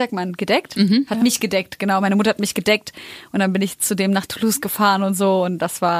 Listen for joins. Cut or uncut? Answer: uncut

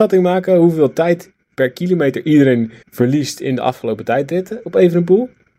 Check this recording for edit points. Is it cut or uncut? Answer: cut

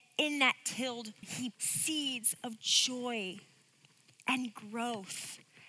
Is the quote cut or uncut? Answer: cut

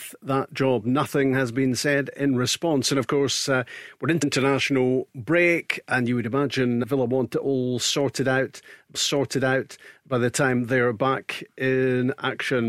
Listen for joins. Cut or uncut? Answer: cut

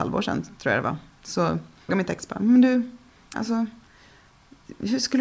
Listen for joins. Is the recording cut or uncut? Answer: cut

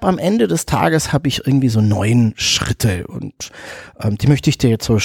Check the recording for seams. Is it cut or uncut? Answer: uncut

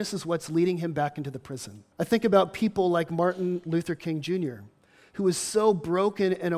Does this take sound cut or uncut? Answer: cut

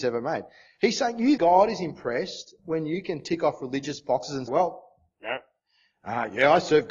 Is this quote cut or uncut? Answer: cut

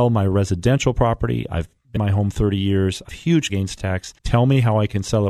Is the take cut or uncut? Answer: cut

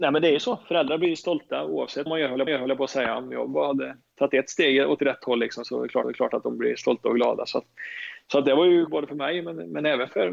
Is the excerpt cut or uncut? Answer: cut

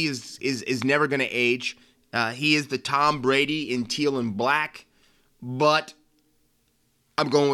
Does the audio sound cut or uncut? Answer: uncut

